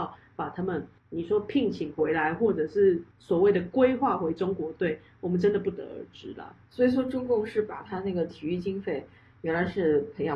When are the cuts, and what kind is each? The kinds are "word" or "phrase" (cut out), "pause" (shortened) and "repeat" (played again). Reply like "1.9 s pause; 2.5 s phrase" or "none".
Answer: none